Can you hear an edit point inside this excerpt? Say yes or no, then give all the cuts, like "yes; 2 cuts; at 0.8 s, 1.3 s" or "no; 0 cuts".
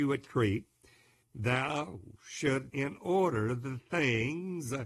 yes; 2 cuts; at 1.2 s, 2.7 s